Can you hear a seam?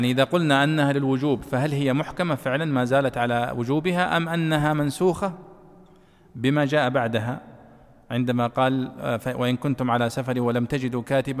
no; 0 cuts

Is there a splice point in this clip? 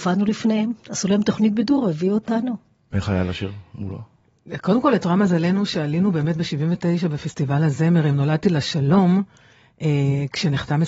no; 0 cuts

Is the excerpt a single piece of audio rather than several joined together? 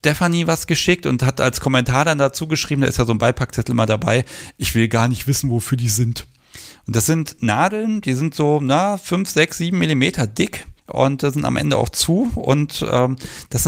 no; 1 cut; at 10.8 s

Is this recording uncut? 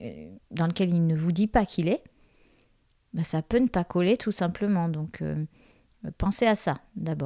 yes; 0 cuts

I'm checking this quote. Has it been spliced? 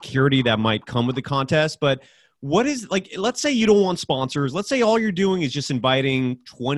no; 0 cuts

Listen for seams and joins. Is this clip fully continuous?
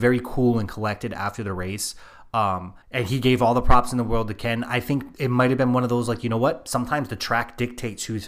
no; 2 cuts; at 2.8 s, 5.1 s

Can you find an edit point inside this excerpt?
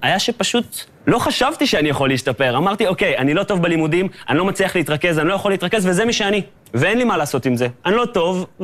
no; 0 cuts

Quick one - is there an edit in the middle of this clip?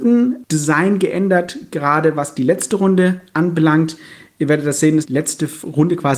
yes; 1 cut; at 5.0 s

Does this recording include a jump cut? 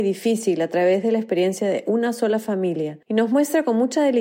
yes; 1 cut; at 3.0 s

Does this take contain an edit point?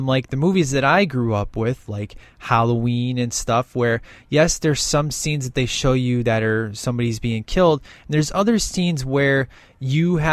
no; 0 cuts

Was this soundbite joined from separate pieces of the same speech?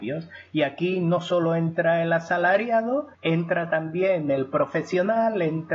yes; 1 cut; at 3.1 s

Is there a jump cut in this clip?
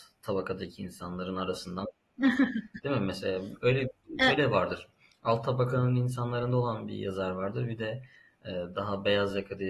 no; 0 cuts

